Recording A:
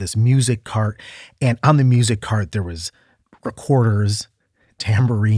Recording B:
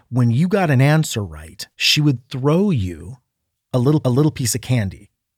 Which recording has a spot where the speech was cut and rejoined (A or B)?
B